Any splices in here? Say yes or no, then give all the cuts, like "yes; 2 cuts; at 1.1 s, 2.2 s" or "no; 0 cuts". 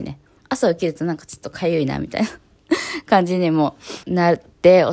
yes; 1 cut; at 4.0 s